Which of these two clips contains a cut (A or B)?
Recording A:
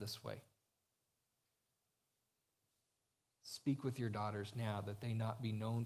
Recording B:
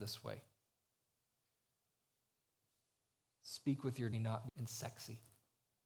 B